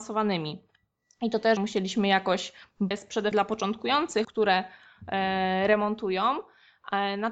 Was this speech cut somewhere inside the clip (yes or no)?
yes